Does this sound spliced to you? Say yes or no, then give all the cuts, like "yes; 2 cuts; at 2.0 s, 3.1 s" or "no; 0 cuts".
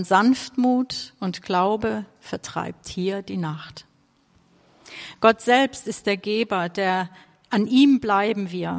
no; 0 cuts